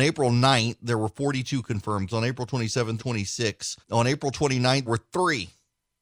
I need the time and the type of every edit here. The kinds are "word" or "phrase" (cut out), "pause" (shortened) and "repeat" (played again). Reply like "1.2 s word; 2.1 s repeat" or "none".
2.1 s word; 3.0 s phrase; 3.8 s pause; 4.9 s word

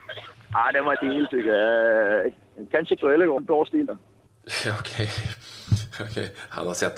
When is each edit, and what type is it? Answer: 0.9 s word; 3.0 s word; 3.4 s phrase; 3.9 s word

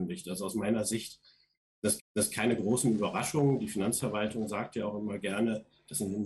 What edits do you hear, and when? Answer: 2.0 s repeat

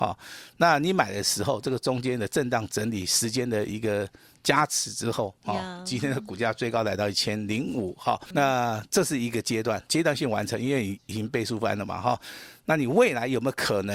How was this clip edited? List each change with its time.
8.3 s word; 9.9 s word

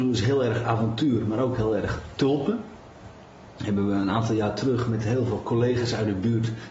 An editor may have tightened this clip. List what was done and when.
none

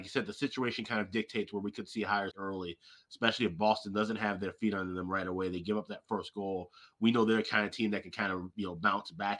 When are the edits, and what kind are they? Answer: 2.3 s word

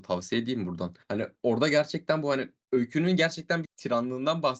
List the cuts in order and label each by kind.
1.0 s pause; 3.6 s word

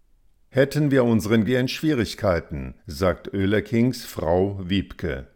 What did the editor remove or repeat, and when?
1.5 s phrase; 2.8 s pause

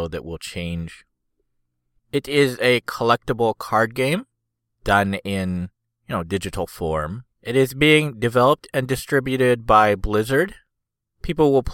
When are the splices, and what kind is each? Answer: 7.3 s pause

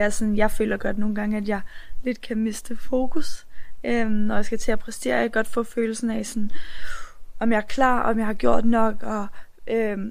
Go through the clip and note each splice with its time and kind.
none

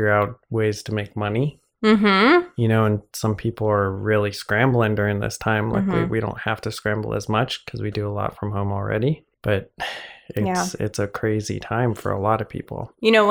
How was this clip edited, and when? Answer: 9.3 s pause

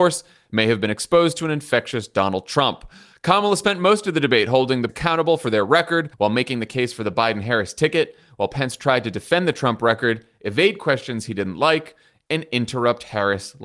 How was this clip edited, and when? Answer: 4.9 s phrase; 6.1 s pause

